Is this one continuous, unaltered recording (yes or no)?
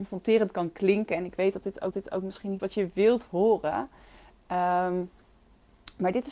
no